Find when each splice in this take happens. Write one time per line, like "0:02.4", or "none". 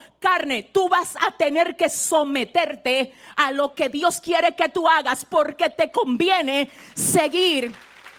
none